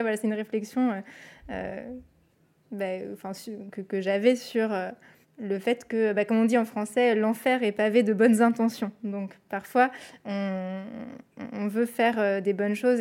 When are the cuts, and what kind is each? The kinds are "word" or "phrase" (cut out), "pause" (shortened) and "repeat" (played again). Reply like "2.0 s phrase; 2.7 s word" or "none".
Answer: 5.2 s pause